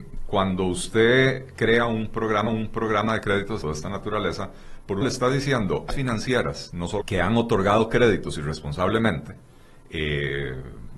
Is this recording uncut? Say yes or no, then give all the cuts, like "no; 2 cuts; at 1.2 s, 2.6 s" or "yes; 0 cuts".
no; 5 cuts; at 2.5 s, 3.6 s, 5.0 s, 5.9 s, 7.0 s